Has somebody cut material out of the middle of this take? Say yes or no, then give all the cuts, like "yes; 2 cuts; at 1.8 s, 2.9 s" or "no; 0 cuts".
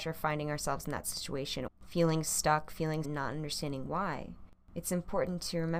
yes; 3 cuts; at 1.7 s, 3.0 s, 4.6 s